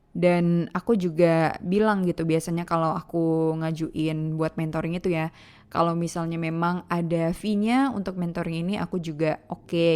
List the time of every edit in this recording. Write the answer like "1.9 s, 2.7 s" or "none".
none